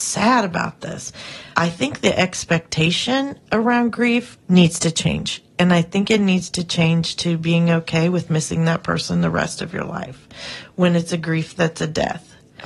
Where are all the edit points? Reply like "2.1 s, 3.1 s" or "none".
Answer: 1.5 s, 4.4 s